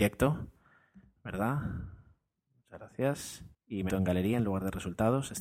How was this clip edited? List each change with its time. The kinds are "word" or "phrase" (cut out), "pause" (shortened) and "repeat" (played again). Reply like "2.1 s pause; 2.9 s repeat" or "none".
3.5 s pause; 3.9 s word